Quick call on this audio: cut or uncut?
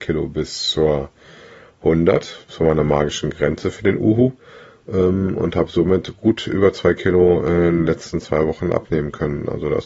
uncut